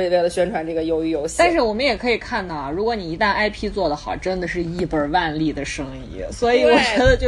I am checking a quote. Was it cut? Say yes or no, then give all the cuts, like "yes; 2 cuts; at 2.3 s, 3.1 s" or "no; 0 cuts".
no; 0 cuts